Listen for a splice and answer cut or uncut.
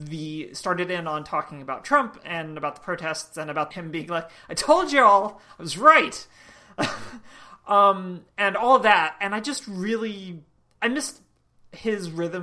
cut